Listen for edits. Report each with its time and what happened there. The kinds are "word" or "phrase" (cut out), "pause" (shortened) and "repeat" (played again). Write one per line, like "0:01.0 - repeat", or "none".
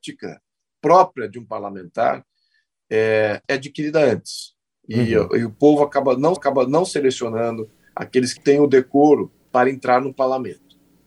0:03.4 - word
0:06.4 - repeat
0:08.4 - word
0:09.4 - pause